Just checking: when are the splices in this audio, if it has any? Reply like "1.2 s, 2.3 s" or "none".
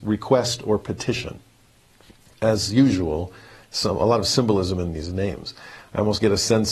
none